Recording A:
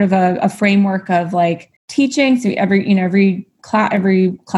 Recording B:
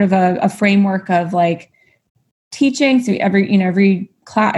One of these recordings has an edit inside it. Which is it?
A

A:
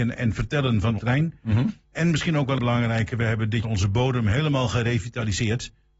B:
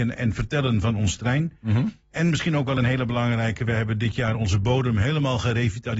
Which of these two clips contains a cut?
A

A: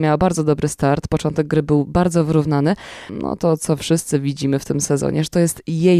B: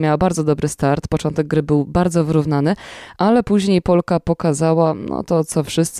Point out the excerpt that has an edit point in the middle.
A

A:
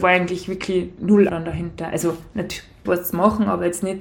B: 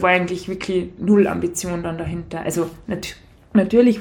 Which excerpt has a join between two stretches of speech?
A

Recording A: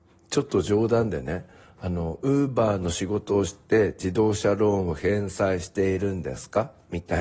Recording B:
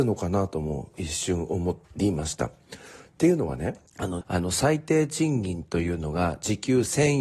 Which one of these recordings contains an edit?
B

